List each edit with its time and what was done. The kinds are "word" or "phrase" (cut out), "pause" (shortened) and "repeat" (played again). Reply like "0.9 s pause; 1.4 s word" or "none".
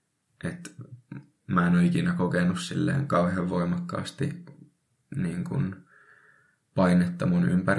none